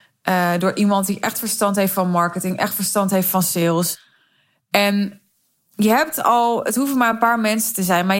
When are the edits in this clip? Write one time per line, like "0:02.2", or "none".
none